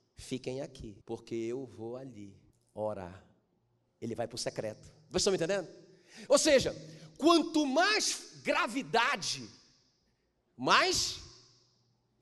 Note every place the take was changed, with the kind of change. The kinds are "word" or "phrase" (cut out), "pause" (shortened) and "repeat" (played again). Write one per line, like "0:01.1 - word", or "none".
0:01.0 - pause
0:02.5 - pause